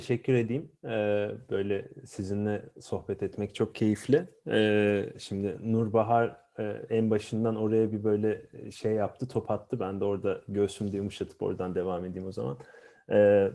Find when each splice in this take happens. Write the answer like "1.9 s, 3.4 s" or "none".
none